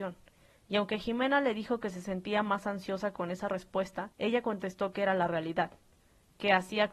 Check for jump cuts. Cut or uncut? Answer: cut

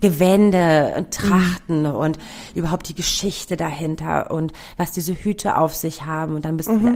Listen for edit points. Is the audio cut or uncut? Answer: uncut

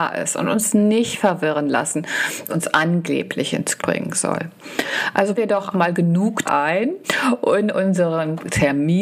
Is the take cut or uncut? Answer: cut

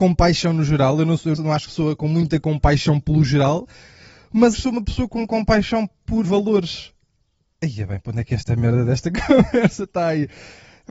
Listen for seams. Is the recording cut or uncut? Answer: cut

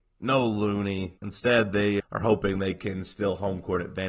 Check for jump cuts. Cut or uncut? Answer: cut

